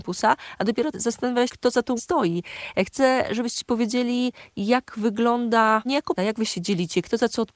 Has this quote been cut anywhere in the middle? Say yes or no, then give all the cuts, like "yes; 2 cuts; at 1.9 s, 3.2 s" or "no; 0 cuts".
yes; 5 cuts; at 0.9 s, 1.5 s, 2.0 s, 5.9 s, 6.2 s